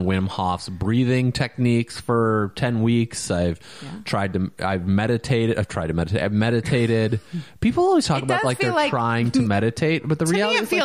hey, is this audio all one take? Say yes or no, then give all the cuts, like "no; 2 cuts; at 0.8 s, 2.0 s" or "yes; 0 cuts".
yes; 0 cuts